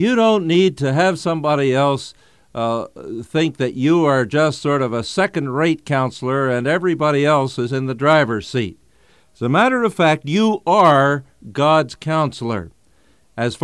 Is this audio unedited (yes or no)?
yes